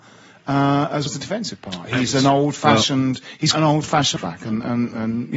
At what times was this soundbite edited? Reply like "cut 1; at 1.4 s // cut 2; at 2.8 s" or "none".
cut 1; at 1.1 s // cut 2; at 3.5 s // cut 3; at 4.2 s